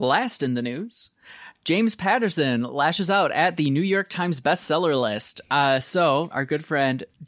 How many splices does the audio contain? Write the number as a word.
zero